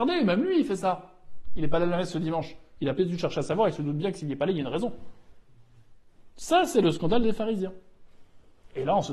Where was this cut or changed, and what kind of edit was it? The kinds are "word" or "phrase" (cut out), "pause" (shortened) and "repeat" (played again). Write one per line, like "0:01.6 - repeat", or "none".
none